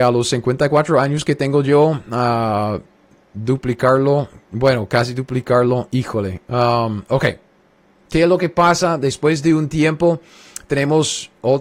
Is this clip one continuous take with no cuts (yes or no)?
yes